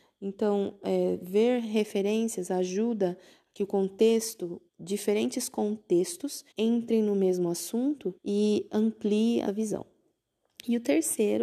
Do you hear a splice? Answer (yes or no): yes